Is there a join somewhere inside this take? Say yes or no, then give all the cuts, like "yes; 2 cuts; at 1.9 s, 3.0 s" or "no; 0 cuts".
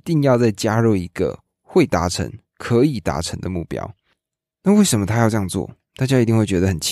no; 0 cuts